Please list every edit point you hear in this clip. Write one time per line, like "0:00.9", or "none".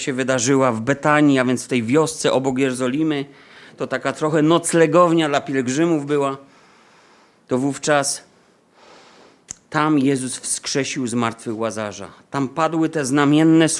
none